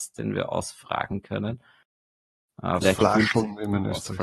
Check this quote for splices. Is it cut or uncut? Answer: cut